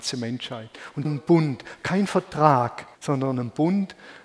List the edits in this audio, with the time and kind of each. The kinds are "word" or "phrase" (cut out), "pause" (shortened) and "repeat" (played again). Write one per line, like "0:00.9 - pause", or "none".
0:01.0 - word
0:02.9 - pause